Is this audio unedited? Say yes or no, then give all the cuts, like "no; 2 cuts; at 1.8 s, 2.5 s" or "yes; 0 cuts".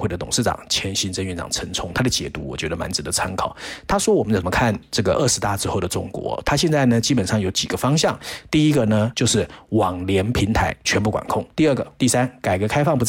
no; 2 cuts; at 11.5 s, 12.0 s